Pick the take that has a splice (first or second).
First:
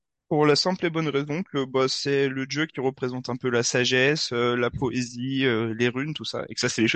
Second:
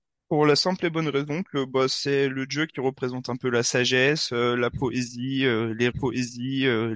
second